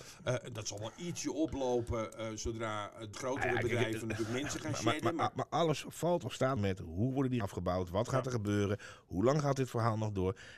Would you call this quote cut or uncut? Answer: cut